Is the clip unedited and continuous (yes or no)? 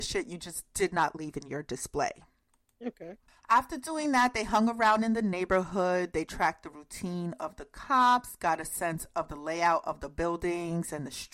yes